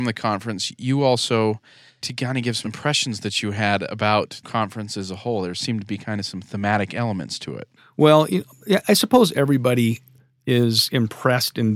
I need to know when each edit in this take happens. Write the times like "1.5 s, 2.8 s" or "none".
2.0 s, 2.6 s, 4.4 s, 7.8 s

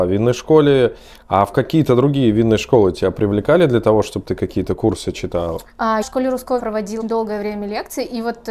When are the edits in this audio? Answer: 6.0 s, 6.6 s, 7.0 s

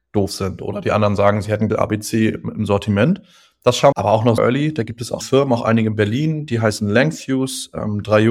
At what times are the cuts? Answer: 1.7 s, 3.9 s, 4.4 s, 5.2 s

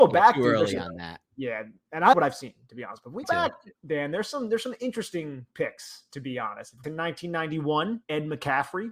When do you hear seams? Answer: 1.3 s, 2.1 s, 3.2 s, 3.8 s, 6.8 s, 8.0 s

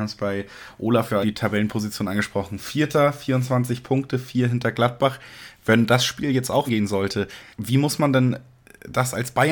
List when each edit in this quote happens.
1.2 s, 6.7 s, 7.5 s

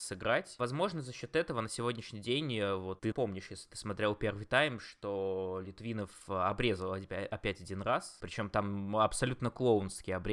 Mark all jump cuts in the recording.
3.1 s

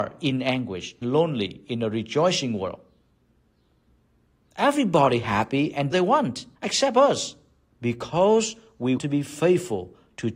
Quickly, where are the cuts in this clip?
1.0 s, 5.9 s, 6.5 s, 7.7 s, 9.0 s

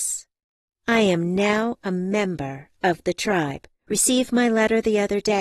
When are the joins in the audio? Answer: 3.8 s

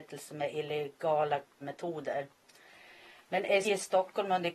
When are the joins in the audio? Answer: 1.6 s, 3.6 s

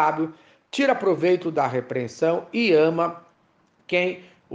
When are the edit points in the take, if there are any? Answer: none

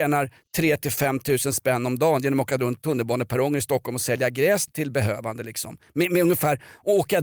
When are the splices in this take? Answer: 2.8 s, 4.7 s

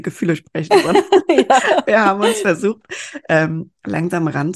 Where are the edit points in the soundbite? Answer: none

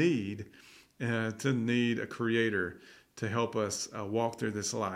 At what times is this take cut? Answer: none

